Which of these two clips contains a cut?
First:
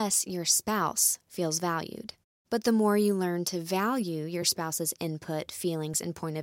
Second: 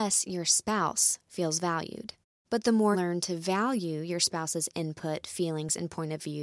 second; 1 cut; at 2.9 s

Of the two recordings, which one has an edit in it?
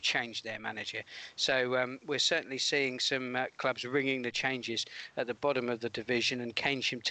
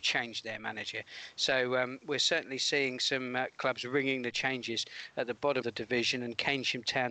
second; 1 cut; at 5.6 s

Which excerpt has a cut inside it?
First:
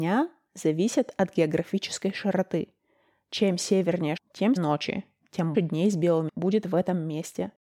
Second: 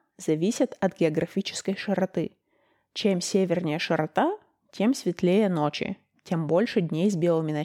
first; 4 cuts; at 4.2 s, 4.6 s, 5.5 s, 6.3 s

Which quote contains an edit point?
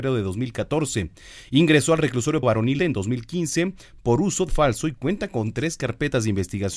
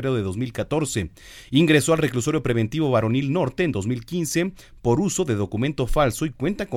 first; 3 cuts; at 2.4 s, 2.8 s, 4.5 s

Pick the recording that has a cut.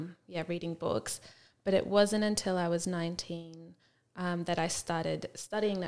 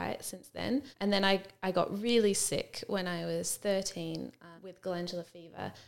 second; 2 cuts; at 0.9 s, 4.6 s

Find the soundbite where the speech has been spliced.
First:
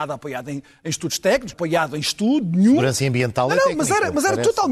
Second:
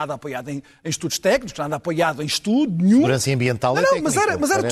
first; 1 cut; at 1.5 s

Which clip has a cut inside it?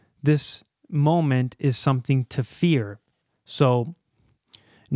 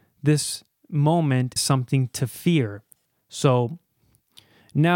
second; 1 cut; at 1.6 s

